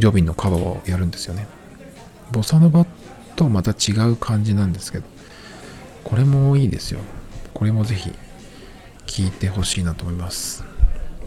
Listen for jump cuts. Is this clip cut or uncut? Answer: cut